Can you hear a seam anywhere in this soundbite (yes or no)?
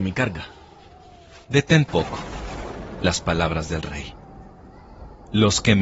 yes